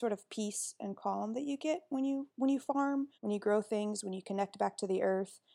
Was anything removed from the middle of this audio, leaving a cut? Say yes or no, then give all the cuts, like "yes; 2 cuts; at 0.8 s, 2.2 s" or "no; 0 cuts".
yes; 1 cut; at 3.1 s